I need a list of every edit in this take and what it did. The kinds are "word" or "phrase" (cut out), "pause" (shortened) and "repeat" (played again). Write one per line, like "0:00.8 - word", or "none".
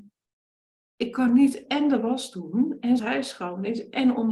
0:03.0 - phrase